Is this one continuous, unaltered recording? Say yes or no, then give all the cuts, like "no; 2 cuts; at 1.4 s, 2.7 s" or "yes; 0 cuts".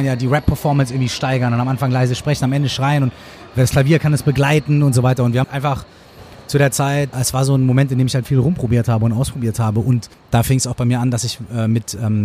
no; 4 cuts; at 5.4 s, 7.1 s, 8.2 s, 10.1 s